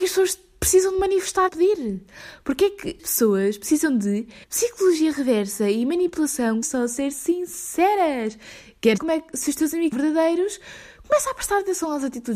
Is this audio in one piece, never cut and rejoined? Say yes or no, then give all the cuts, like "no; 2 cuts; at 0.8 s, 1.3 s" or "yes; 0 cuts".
no; 6 cuts; at 1.5 s, 3.0 s, 4.4 s, 6.6 s, 9.0 s, 9.9 s